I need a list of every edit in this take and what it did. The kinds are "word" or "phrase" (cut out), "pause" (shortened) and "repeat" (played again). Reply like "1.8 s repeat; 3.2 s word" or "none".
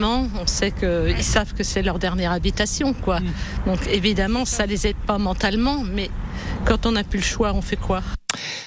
none